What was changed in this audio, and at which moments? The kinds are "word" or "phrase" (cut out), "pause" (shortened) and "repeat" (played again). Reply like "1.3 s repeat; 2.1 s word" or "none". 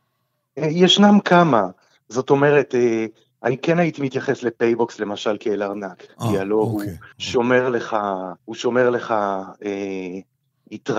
7.1 s pause; 8.4 s pause